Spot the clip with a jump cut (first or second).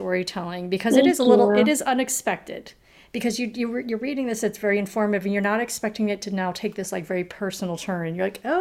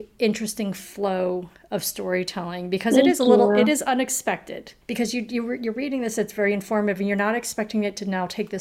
second